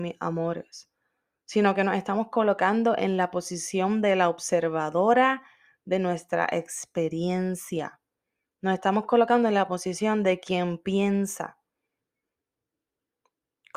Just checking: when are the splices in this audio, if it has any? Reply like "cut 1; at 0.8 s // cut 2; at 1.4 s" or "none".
none